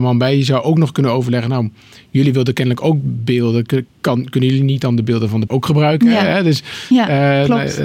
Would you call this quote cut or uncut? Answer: cut